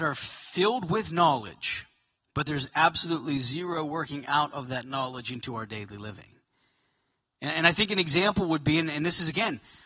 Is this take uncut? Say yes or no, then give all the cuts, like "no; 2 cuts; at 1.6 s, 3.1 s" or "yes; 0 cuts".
no; 1 cut; at 2.1 s